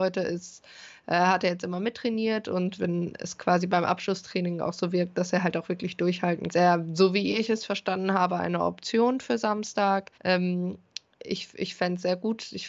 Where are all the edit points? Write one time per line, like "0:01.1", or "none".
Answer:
0:02.8
0:06.5
0:10.2